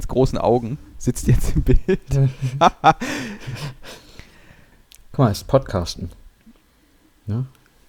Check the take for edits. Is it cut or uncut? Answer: uncut